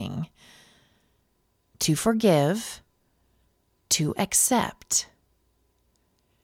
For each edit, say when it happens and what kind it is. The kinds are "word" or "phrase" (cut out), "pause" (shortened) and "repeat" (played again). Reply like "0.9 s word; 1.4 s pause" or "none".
none